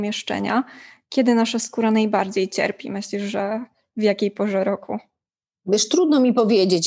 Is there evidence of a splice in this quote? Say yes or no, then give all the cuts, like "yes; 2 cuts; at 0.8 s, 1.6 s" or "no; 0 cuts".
no; 0 cuts